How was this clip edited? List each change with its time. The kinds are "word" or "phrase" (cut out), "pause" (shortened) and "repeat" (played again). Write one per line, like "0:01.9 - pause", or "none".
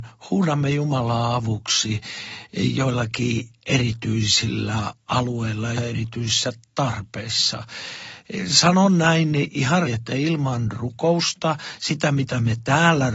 0:05.8 - word
0:09.8 - word